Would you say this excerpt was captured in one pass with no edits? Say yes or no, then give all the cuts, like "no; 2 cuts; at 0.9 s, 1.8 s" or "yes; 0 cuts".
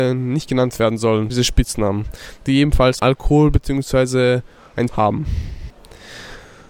no; 3 cuts; at 1.3 s, 3.0 s, 4.9 s